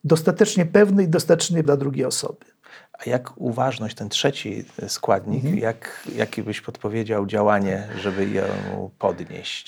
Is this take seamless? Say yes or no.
no